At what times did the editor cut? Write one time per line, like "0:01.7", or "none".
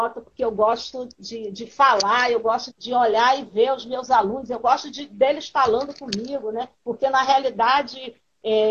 0:01.1
0:02.7
0:06.7